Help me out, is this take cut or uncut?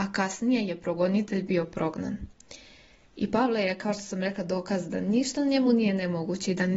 uncut